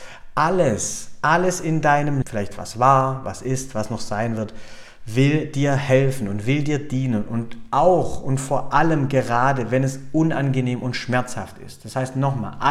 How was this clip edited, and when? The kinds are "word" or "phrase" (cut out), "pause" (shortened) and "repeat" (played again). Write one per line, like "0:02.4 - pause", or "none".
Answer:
0:02.2 - word